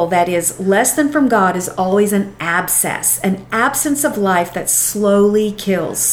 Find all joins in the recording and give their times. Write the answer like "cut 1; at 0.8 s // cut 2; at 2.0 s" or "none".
none